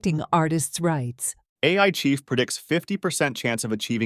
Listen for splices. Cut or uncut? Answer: uncut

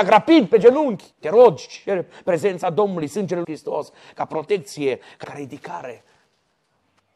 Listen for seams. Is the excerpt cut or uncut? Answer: cut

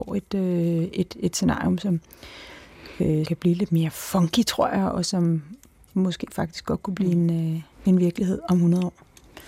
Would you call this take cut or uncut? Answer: cut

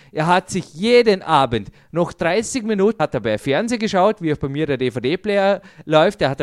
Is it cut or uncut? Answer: cut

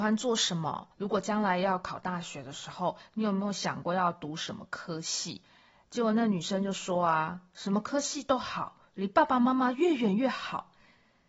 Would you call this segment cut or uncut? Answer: cut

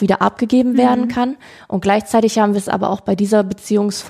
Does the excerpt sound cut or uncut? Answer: uncut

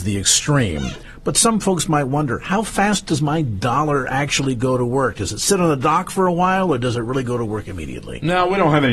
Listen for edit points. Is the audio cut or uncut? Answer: uncut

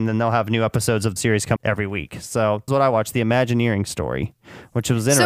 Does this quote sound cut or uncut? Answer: cut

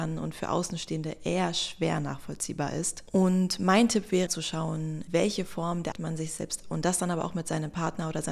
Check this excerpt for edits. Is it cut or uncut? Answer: cut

